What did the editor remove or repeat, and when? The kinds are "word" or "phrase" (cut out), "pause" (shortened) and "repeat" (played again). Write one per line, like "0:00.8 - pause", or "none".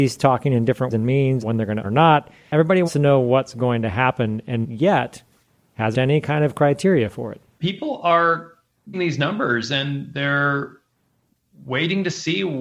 0:00.9 - word
0:01.4 - word
0:01.8 - word
0:02.9 - word
0:04.6 - word
0:05.9 - word
0:08.9 - word